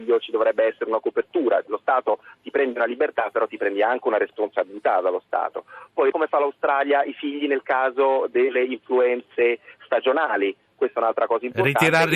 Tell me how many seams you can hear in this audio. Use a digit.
2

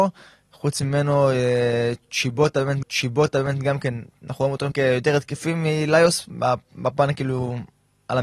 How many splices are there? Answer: 2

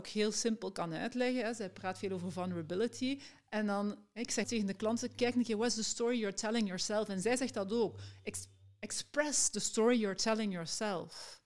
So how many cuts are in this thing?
1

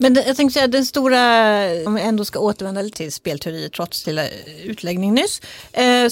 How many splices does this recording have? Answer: 3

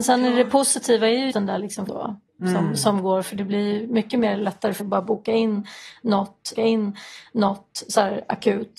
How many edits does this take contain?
5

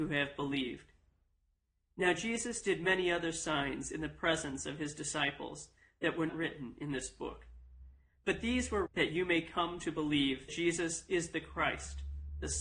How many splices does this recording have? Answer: 3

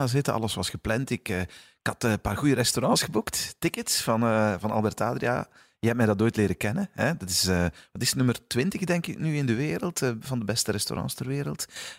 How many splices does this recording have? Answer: 0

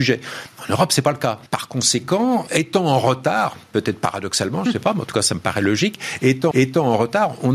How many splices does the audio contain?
3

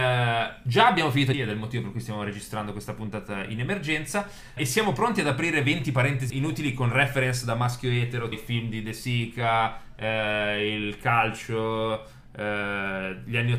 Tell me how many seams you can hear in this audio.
4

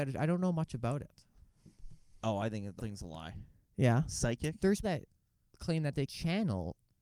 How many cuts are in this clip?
3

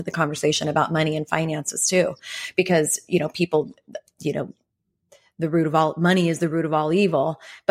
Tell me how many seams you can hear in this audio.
0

